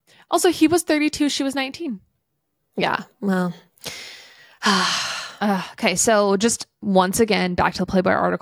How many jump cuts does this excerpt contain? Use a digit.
0